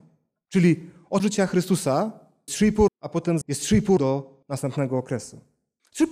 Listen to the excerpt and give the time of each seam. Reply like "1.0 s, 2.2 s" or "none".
1.2 s, 2.5 s, 2.9 s, 3.4 s, 4.0 s, 4.4 s